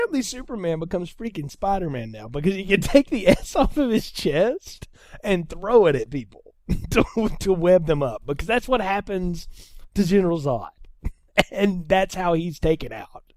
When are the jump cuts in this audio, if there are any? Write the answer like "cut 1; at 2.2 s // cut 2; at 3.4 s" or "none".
none